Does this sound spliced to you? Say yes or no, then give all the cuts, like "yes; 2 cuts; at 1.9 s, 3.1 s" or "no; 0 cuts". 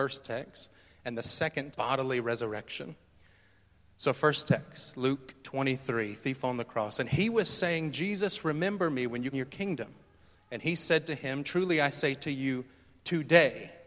yes; 2 cuts; at 1.7 s, 9.3 s